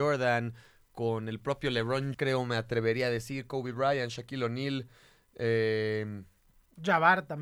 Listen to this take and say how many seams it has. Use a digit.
1